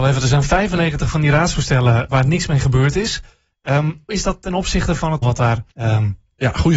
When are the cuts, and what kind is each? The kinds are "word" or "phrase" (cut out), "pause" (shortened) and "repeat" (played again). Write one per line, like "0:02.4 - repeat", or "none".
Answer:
0:02.1 - word
0:04.1 - word
0:05.2 - word
0:05.7 - pause